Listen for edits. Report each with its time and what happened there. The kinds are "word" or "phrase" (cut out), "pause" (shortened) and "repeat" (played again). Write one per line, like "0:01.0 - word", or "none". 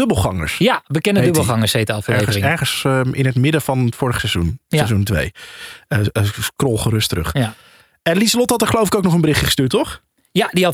none

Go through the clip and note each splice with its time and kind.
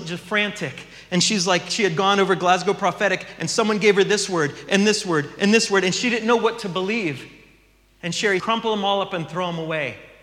0:08.4 - word

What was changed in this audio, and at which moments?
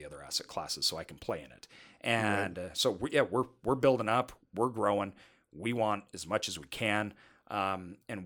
none

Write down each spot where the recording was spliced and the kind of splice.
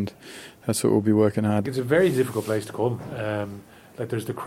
0:01.6 - phrase

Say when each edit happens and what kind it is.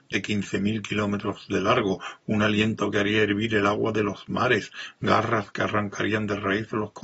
none

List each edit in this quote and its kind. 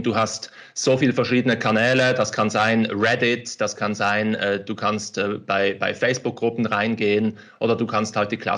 none

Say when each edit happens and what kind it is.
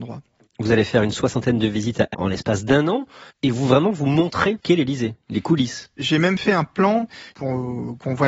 0:02.1 - phrase
0:03.3 - pause
0:04.6 - word

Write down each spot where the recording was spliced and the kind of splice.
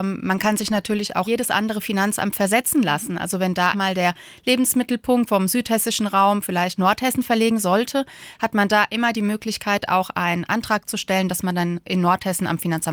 0:01.2 - phrase
0:03.7 - word
0:05.3 - word
0:06.8 - word

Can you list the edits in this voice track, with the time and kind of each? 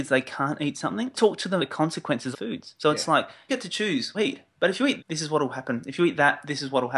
0:01.1 - word
0:01.6 - word
0:02.3 - phrase
0:03.5 - word
0:04.1 - phrase
0:05.0 - word

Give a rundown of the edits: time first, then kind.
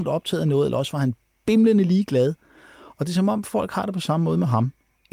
none

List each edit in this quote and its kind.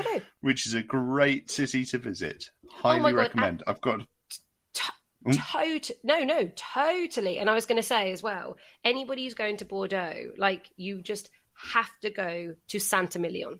none

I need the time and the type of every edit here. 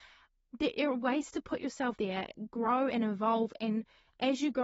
0:02.0 - word

